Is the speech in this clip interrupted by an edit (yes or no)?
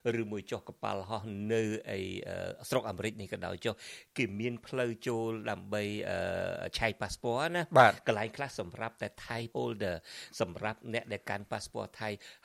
yes